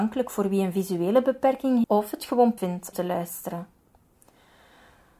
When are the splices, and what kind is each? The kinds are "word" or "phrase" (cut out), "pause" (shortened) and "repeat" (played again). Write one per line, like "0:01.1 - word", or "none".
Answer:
0:01.8 - word
0:02.6 - word
0:02.9 - word